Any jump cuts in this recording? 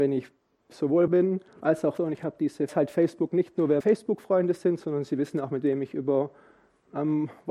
yes; 5 cuts; at 1.1 s, 1.5 s, 2.0 s, 2.7 s, 3.8 s

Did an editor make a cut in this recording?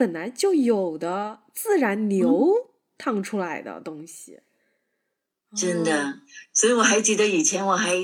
no; 0 cuts

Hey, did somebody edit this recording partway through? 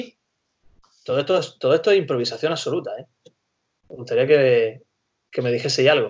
no; 0 cuts

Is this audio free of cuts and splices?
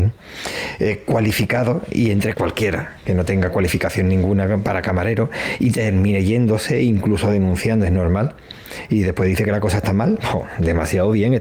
no; 1 cut; at 2.3 s

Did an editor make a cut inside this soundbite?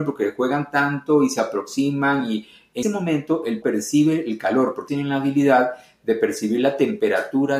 yes; 3 cuts; at 2.8 s, 3.6 s, 4.9 s

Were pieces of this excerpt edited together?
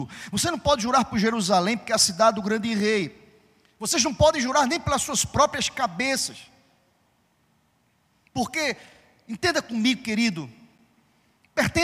no; 0 cuts

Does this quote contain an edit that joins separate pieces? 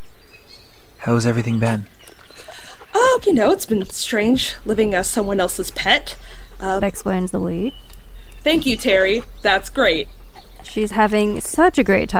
yes; 2 cuts; at 3.2 s, 6.8 s

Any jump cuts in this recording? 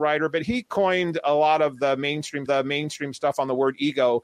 yes; 1 cut; at 2.5 s

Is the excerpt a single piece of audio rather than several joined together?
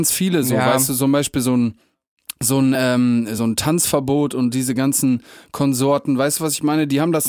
yes; 0 cuts

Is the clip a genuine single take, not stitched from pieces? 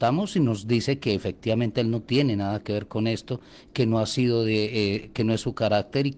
yes; 0 cuts

